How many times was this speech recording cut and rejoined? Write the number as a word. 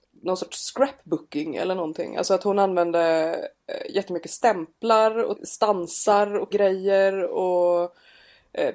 two